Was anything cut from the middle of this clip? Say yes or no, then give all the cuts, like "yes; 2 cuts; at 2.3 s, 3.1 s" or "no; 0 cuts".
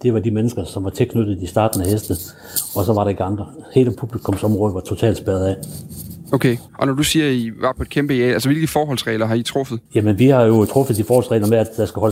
yes; 2 cuts; at 6.7 s, 9.9 s